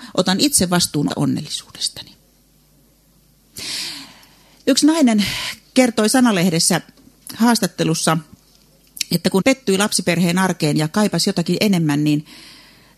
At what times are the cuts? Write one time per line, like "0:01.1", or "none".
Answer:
0:01.1
0:09.4